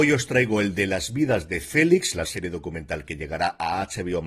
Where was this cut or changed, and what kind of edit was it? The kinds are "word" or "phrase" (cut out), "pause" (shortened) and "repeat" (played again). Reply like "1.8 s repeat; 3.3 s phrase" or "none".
2.2 s word